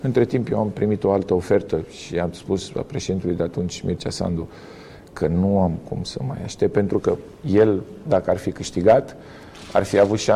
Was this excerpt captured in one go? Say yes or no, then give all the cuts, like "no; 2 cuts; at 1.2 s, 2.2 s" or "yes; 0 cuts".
yes; 0 cuts